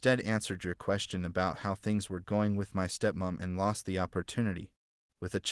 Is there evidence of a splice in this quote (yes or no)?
no